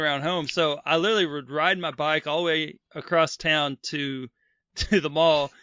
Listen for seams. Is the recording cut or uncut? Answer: uncut